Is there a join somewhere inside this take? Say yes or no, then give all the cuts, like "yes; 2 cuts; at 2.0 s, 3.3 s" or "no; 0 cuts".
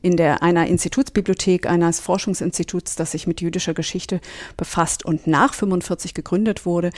no; 0 cuts